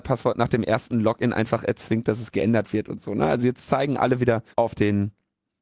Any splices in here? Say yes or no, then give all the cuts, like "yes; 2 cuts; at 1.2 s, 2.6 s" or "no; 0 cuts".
yes; 1 cut; at 4.5 s